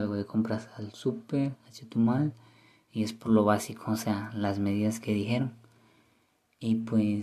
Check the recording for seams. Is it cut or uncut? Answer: uncut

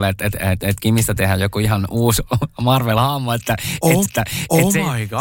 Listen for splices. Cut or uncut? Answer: cut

